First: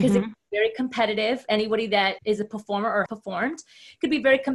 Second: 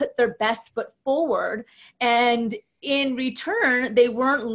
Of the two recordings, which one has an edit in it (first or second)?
first